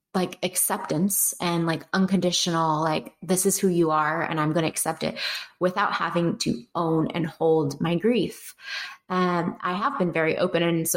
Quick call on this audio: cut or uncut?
uncut